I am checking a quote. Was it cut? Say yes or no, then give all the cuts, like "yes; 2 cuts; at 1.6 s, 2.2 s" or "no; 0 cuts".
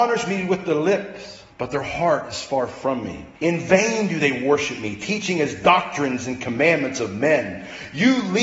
yes; 2 cuts; at 1.5 s, 3.4 s